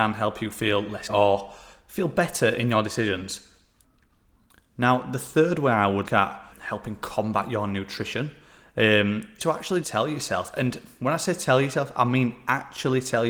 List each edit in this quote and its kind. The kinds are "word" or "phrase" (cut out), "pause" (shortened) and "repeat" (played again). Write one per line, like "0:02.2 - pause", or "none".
0:01.1 - word
0:06.1 - word
0:06.5 - word
0:09.4 - word
0:09.8 - word